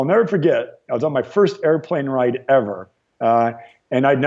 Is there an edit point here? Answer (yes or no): no